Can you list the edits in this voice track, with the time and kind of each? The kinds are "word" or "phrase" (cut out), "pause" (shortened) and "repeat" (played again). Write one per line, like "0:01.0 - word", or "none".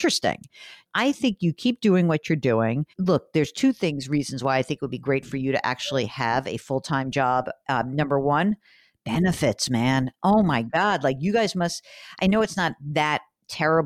0:02.9 - pause